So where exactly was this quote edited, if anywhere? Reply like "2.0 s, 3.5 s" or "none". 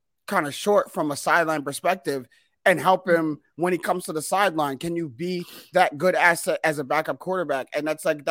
none